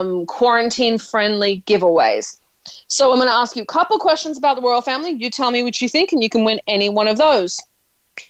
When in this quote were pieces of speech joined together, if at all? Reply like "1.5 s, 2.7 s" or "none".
none